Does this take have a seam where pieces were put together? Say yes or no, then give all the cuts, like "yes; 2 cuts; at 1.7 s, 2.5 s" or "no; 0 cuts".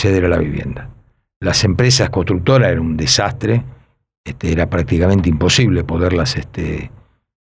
no; 0 cuts